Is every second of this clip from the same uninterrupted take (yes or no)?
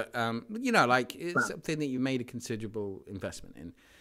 yes